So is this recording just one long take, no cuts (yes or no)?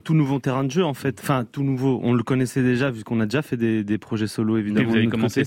yes